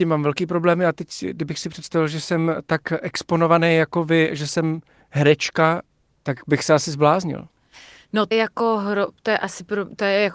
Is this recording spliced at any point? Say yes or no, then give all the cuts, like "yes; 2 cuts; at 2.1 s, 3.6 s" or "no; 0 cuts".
yes; 1 cut; at 8.3 s